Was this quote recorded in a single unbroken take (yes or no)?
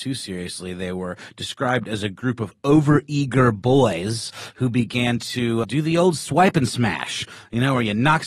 no